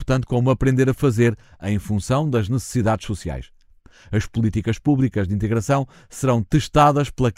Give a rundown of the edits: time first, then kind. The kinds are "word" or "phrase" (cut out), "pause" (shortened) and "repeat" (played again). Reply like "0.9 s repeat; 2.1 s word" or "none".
none